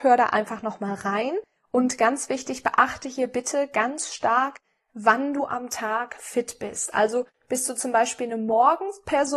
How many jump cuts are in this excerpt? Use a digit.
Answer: 0